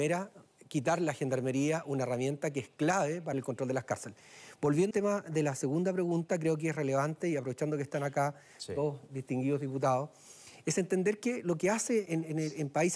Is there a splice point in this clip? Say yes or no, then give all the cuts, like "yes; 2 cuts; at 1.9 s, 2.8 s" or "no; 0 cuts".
yes; 3 cuts; at 3.3 s, 4.9 s, 12.1 s